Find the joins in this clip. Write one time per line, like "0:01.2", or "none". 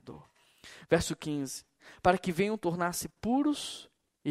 none